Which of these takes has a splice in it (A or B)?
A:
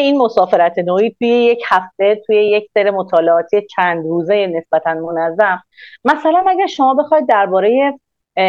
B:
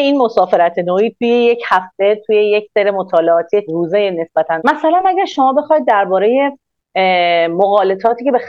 B